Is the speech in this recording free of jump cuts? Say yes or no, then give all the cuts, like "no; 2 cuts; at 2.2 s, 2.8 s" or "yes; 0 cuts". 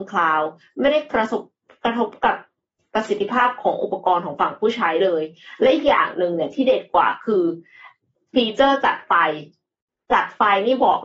yes; 0 cuts